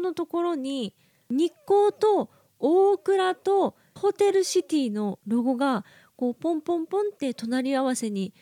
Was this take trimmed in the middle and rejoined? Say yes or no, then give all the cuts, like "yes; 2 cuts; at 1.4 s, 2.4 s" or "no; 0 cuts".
yes; 1 cut; at 4.0 s